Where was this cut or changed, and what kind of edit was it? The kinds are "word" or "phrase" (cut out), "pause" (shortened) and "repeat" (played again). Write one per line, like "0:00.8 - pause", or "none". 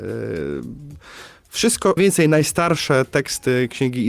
0:02.0 - word